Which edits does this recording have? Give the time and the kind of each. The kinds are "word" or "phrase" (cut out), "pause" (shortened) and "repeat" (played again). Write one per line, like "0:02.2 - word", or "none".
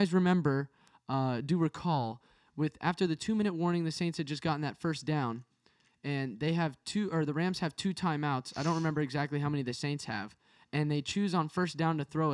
none